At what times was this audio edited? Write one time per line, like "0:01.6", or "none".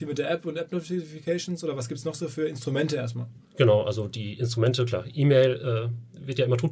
0:03.4